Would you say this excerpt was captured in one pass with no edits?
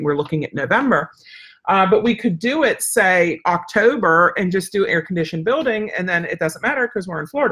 no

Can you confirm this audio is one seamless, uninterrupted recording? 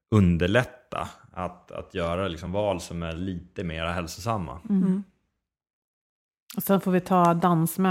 yes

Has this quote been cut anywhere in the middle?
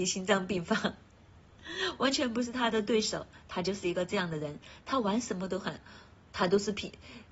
no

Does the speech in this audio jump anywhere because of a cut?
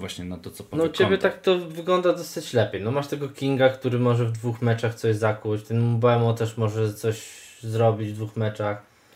no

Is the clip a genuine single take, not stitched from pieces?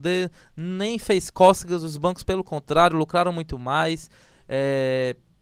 yes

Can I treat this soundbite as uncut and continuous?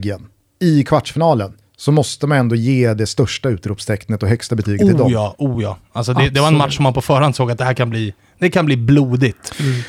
yes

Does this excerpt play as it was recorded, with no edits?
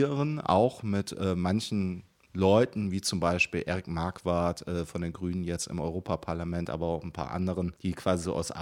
yes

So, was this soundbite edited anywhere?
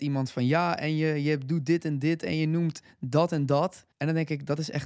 yes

